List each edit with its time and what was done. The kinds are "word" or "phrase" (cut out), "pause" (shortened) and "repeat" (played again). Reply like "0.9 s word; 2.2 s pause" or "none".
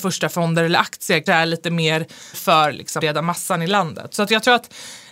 1.3 s word; 2.3 s word; 3.0 s word